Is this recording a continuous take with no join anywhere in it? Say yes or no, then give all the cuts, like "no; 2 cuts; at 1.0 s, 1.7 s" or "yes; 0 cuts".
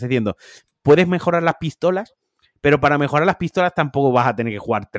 yes; 0 cuts